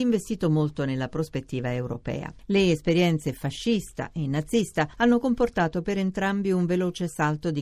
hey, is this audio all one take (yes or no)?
yes